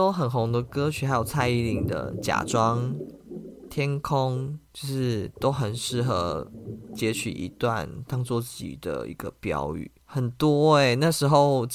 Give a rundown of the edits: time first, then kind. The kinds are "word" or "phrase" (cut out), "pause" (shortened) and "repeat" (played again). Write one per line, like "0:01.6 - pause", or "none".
0:04.7 - pause
0:10.0 - pause